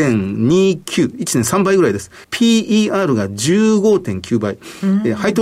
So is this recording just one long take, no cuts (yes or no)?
no